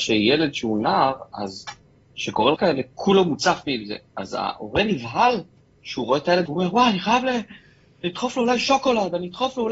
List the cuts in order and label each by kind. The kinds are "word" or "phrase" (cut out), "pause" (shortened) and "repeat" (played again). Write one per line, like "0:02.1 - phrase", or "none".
0:02.6 - word
0:06.5 - word